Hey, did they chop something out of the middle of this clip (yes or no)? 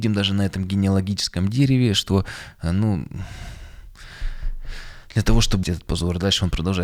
yes